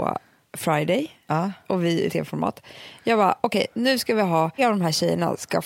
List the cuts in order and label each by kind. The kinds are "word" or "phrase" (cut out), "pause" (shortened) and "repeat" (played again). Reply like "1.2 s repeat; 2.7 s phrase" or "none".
2.1 s word; 4.6 s word